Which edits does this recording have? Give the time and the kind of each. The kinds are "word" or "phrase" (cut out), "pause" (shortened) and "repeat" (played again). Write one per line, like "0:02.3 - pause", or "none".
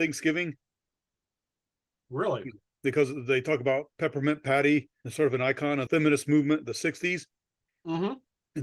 0:05.0 - phrase
0:05.9 - word